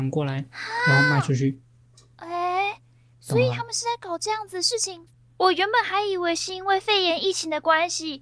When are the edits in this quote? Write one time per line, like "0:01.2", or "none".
none